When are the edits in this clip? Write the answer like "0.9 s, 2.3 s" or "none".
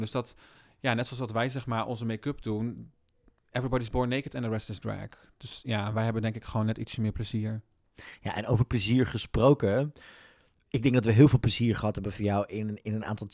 none